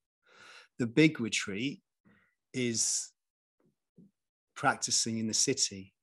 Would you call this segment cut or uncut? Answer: uncut